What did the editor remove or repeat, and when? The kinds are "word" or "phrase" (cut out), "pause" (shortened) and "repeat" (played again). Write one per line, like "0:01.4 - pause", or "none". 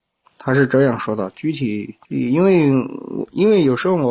0:02.0 - pause